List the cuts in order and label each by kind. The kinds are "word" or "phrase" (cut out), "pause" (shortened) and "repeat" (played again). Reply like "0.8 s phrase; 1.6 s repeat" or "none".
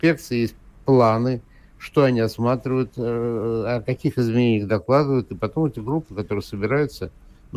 none